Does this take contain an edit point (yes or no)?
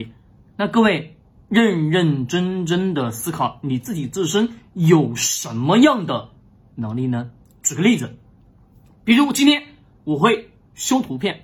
no